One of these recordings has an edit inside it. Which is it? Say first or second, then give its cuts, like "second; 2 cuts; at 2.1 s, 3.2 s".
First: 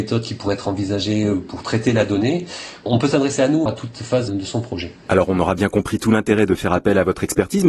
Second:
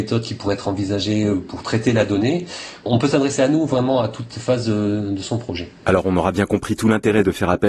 first; 2 cuts; at 3.7 s, 4.3 s